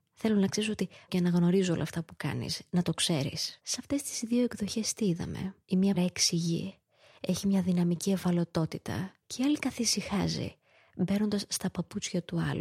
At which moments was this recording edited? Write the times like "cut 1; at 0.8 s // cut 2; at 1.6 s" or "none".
cut 1; at 1.1 s // cut 2; at 3.6 s // cut 3; at 5.6 s // cut 4; at 6.0 s // cut 5; at 9.2 s